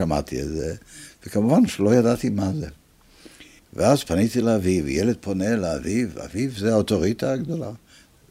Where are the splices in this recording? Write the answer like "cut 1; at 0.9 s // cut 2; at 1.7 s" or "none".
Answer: cut 1; at 3.6 s